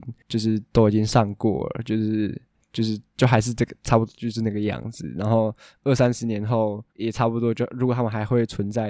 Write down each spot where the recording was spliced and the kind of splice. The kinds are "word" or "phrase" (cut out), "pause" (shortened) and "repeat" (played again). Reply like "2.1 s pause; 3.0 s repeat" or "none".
6.9 s pause

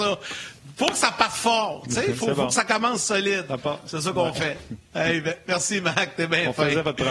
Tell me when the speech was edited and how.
4.8 s pause

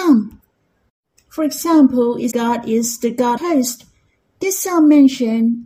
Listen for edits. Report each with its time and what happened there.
2.3 s word; 3.4 s word

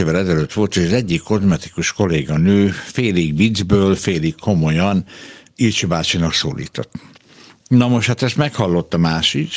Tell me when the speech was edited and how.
none

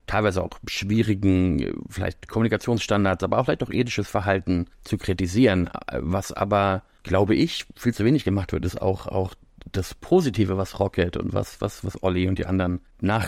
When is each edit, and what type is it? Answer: none

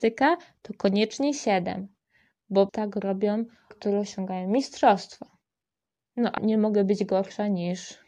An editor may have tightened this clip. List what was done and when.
2.7 s word; 3.7 s word; 6.4 s word

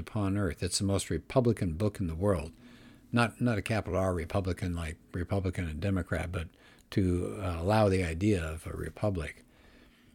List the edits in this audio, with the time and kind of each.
none

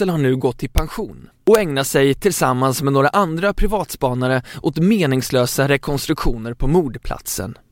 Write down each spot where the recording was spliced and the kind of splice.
none

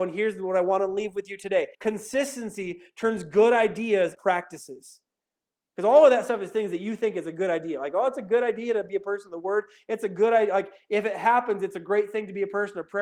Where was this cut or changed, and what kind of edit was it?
1.7 s pause; 4.1 s phrase

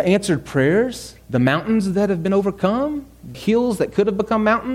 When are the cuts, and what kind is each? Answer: 1.2 s pause; 3.3 s word

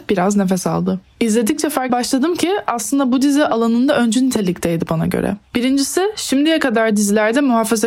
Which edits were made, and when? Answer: 1.9 s word

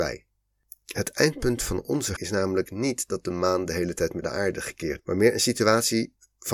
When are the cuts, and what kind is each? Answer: 2.2 s word; 4.2 s phrase; 5.0 s word

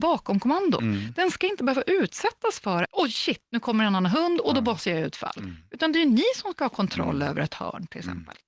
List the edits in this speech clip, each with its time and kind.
2.9 s word

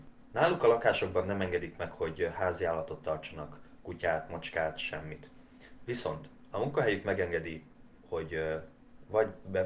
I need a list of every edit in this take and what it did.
none

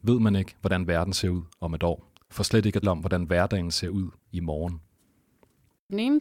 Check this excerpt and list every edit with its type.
2.8 s word

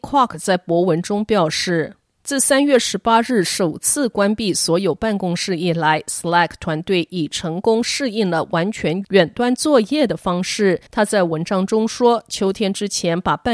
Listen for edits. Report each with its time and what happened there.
10.9 s pause

